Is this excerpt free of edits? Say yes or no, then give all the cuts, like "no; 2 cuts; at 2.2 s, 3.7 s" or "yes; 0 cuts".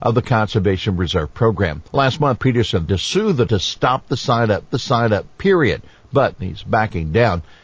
no; 5 cuts; at 1.9 s, 2.4 s, 2.9 s, 3.5 s, 4.7 s